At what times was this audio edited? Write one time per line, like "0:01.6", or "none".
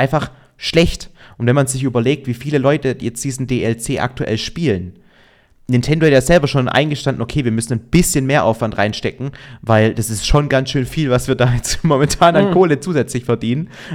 none